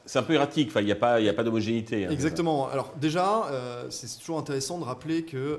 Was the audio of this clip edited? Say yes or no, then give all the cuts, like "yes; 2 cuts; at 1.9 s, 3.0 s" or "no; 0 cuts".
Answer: no; 0 cuts